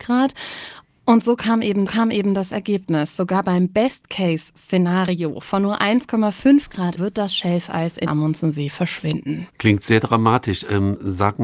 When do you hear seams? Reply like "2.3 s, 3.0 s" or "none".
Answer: 1.9 s, 7.0 s, 8.1 s, 9.5 s